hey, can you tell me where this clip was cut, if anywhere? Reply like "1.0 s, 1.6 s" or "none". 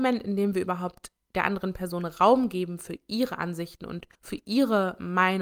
4.1 s